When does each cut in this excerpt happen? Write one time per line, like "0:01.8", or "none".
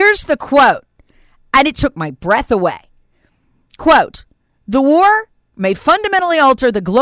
none